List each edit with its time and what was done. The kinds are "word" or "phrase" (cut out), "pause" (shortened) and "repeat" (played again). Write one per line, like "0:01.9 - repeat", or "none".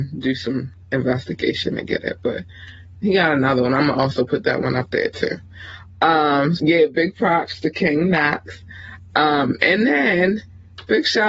0:06.6 - word